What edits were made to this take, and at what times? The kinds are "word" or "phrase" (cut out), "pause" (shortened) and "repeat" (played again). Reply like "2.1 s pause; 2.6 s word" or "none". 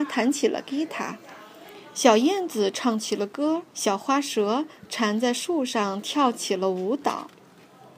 3.7 s pause